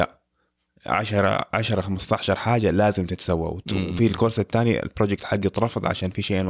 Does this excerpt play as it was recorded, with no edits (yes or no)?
yes